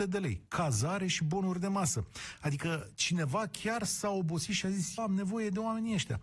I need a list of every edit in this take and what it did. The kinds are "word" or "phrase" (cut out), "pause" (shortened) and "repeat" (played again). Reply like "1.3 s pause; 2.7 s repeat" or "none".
5.0 s word